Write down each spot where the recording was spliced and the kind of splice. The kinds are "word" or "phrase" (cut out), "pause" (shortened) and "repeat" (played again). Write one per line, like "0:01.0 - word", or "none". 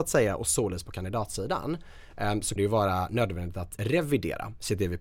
0:02.6 - word
0:03.8 - word